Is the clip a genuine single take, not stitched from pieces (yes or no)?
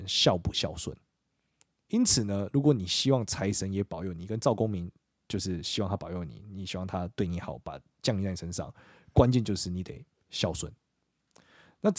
yes